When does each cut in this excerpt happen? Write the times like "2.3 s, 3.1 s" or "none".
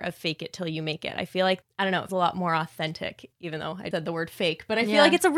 1.6 s, 2.1 s, 3.3 s, 3.9 s